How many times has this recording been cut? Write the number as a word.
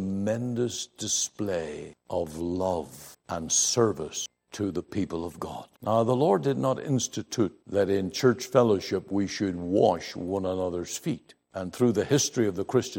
four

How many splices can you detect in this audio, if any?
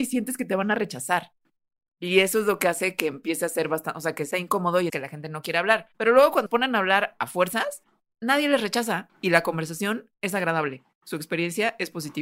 four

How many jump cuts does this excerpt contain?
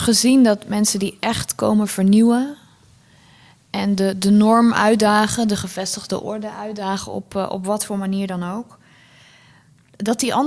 zero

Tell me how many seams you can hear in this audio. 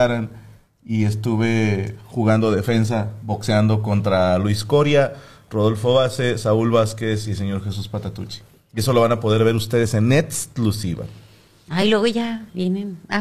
zero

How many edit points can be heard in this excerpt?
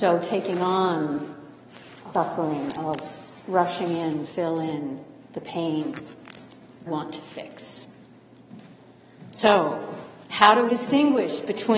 six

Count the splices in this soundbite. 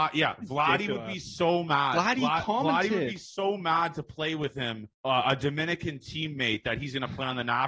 one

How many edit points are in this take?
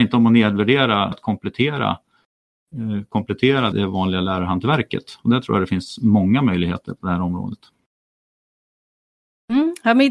two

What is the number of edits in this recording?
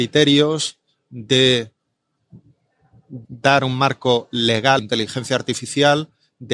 two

